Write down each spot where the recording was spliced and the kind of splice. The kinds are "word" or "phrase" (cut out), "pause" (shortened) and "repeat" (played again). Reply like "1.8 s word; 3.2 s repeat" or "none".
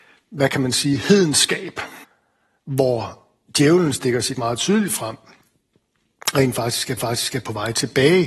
2.0 s pause; 4.3 s word; 7.0 s repeat